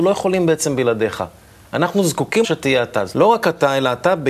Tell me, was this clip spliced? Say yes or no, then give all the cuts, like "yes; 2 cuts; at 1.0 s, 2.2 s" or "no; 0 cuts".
yes; 2 cuts; at 2.4 s, 3.1 s